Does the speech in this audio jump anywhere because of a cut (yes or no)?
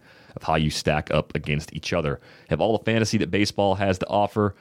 no